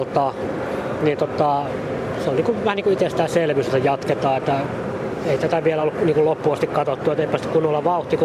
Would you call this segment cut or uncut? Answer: uncut